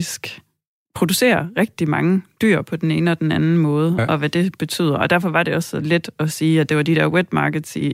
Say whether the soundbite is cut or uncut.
uncut